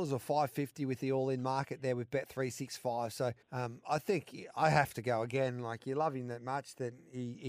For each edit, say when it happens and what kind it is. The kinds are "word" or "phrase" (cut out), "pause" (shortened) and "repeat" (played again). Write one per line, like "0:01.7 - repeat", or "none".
0:03.4 - pause